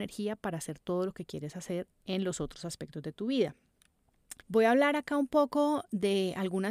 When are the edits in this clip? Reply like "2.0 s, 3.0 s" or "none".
4.4 s